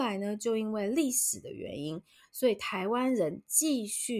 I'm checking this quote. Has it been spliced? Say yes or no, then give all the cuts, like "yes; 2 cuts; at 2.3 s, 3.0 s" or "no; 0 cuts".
no; 0 cuts